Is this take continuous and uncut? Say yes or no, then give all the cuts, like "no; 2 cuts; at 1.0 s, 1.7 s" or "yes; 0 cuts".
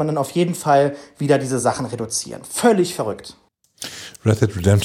yes; 0 cuts